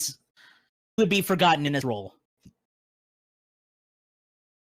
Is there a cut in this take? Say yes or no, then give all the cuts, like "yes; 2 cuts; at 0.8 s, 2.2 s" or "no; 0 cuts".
yes; 2 cuts; at 1.0 s, 1.8 s